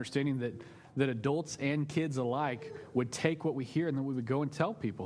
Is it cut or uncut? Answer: uncut